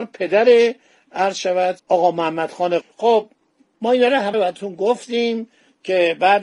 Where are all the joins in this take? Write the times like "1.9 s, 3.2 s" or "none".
1.8 s, 2.8 s, 4.3 s